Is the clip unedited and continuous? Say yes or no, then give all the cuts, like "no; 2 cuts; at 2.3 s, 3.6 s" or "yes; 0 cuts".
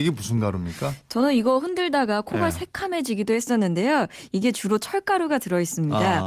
yes; 0 cuts